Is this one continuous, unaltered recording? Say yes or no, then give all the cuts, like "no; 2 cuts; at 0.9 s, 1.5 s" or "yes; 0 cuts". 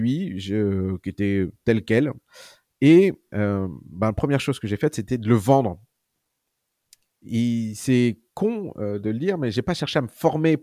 yes; 0 cuts